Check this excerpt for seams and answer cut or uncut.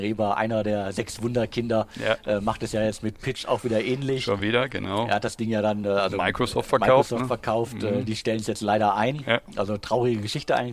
uncut